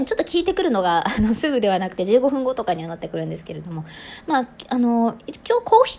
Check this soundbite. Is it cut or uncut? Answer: uncut